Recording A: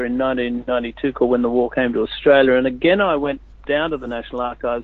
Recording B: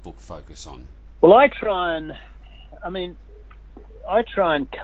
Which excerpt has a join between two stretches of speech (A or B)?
B